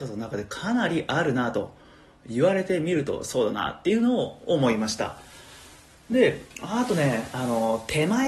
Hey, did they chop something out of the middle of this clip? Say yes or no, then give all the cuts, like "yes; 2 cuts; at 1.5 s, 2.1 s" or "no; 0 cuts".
no; 0 cuts